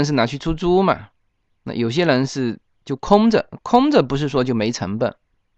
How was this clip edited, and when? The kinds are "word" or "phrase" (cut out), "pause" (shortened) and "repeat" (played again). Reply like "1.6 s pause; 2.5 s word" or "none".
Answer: none